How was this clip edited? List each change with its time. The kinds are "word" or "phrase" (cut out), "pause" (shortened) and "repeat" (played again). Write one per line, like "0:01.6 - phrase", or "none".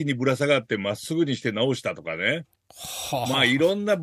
none